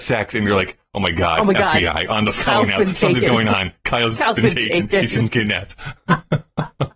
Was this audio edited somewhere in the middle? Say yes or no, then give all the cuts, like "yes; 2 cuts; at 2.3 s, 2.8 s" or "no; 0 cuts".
no; 0 cuts